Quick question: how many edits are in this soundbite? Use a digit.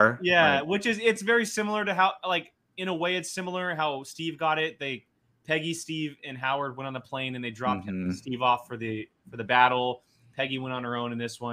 0